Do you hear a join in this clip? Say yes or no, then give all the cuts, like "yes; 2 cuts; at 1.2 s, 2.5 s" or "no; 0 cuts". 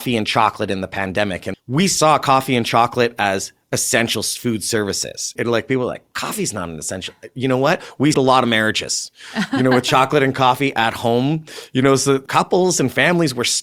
yes; 4 cuts; at 1.5 s, 5.4 s, 8.1 s, 12.3 s